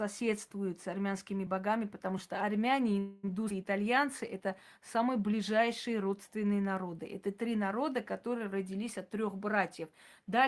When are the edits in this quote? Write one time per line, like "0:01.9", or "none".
none